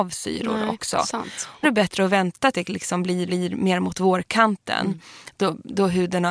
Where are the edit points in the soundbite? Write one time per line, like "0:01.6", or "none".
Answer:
0:01.6
0:02.5
0:03.3